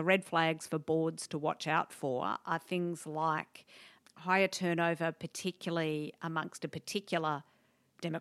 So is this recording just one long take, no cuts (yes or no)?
yes